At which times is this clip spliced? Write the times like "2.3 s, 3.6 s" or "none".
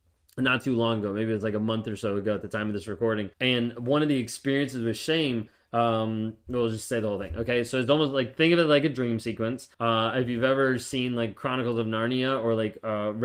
3.3 s, 9.7 s